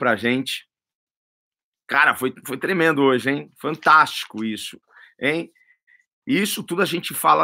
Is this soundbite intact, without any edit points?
yes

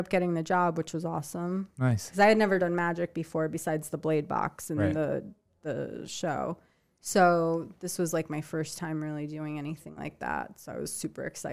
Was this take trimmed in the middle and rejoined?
no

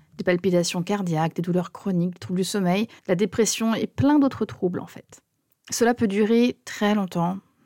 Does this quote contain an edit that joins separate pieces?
yes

